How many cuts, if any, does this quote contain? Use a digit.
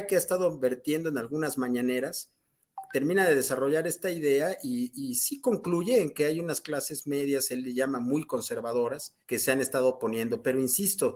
1